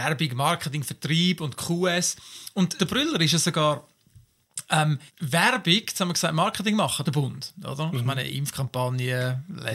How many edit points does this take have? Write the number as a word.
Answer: three